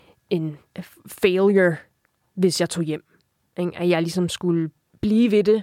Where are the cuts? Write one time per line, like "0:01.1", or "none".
none